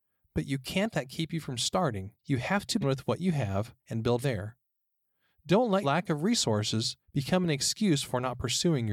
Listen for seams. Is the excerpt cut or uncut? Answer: cut